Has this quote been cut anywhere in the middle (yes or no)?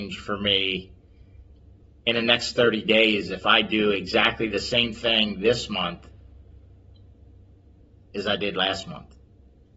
no